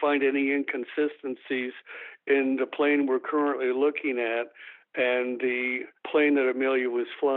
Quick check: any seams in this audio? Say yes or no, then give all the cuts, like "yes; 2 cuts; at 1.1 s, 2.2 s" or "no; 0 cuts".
no; 0 cuts